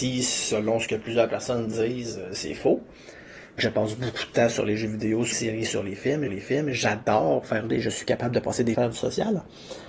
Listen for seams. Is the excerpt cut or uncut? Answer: cut